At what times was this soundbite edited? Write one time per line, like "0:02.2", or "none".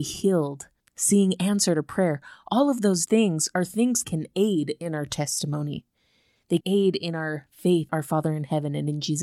0:03.1
0:04.0
0:06.6
0:07.9